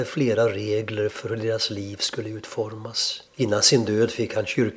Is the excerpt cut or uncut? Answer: cut